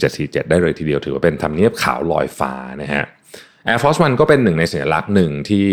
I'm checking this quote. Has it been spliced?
no; 0 cuts

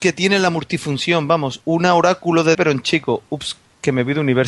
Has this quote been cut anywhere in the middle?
yes; 2 cuts; at 1.6 s, 2.5 s

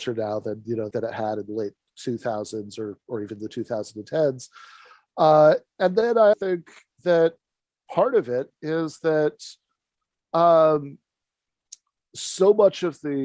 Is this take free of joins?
no; 3 cuts; at 0.9 s, 5.7 s, 6.3 s

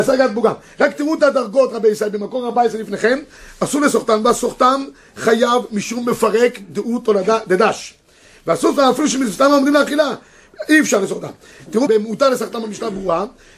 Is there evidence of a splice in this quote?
yes; 1 cut; at 11.9 s

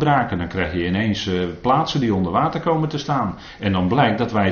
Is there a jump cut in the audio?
no; 0 cuts

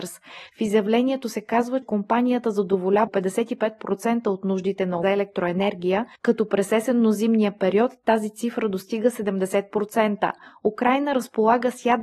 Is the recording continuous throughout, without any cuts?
no; 4 cuts; at 1.8 s, 3.1 s, 5.0 s, 6.2 s

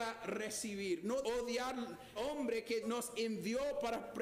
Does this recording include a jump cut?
yes; 3 cuts; at 1.2 s, 2.2 s, 2.8 s

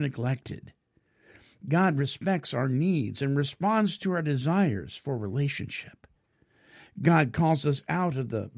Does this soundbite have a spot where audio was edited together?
no; 0 cuts

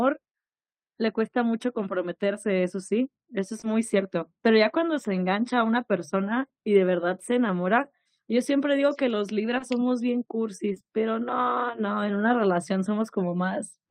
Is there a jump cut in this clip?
yes; 1 cut; at 8.1 s

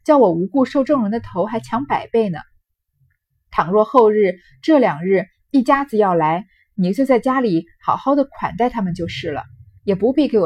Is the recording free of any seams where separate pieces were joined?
yes; 0 cuts

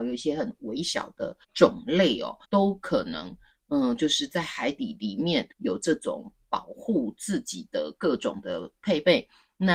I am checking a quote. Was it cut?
yes; 3 cuts; at 1.4 s, 2.4 s, 5.5 s

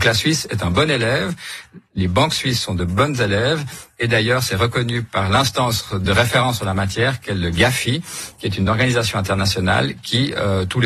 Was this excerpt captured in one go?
yes; 0 cuts

